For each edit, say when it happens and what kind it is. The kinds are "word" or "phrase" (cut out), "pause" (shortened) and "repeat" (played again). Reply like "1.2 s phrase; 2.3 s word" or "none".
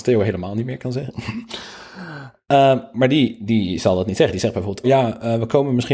4.8 s word